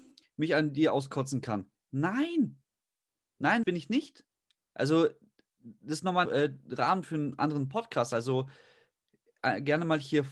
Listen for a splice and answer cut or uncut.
cut